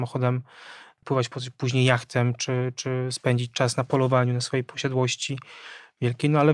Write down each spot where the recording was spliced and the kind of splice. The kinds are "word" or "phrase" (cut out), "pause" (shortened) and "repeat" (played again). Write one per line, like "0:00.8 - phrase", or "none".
none